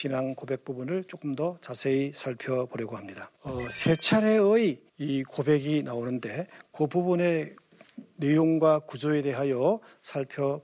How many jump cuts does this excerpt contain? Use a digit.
2